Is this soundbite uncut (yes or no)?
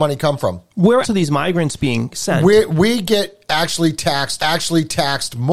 no